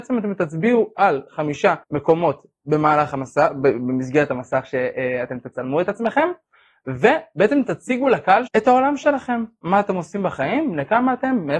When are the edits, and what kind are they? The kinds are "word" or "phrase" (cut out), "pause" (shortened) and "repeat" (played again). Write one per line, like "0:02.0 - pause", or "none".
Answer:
0:01.8 - pause
0:08.5 - word